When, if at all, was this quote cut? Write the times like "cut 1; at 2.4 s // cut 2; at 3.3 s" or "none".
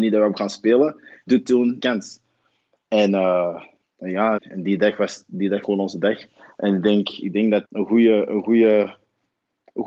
cut 1; at 1.3 s // cut 2; at 1.8 s // cut 3; at 3.8 s // cut 4; at 4.4 s // cut 5; at 5.6 s // cut 6; at 7.6 s